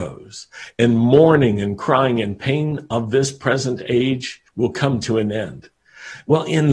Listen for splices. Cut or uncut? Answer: cut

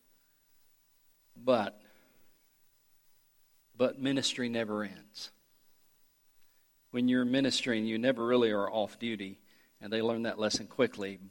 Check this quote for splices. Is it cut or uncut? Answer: uncut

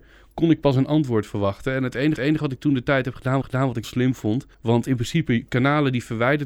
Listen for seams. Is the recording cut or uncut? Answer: cut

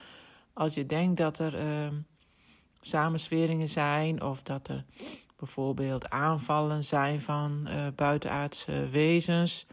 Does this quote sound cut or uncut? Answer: uncut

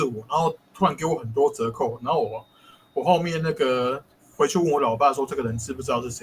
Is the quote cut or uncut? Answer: uncut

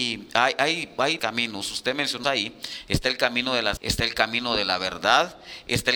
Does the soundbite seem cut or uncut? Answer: cut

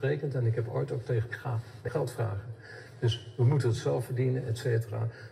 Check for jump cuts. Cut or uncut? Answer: cut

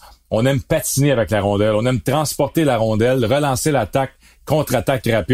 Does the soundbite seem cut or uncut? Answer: uncut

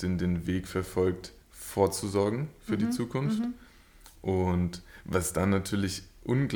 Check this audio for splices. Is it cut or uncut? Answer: cut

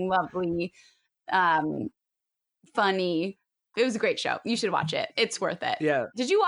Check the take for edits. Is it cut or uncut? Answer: cut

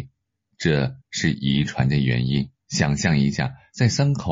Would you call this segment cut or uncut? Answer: cut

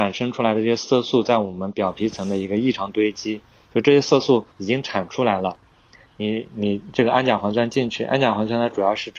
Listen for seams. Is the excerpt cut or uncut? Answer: cut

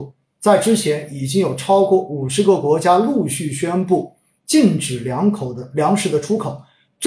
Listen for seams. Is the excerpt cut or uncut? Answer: uncut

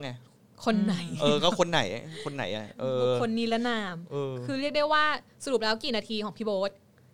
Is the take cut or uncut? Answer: uncut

